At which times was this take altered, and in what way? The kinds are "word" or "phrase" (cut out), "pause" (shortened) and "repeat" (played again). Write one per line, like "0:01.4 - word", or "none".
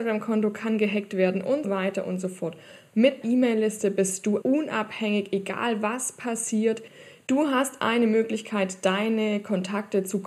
0:01.6 - word
0:03.2 - word
0:04.4 - word